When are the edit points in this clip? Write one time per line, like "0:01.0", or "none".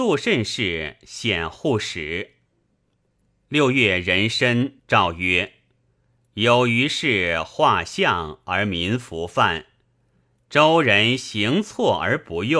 0:04.8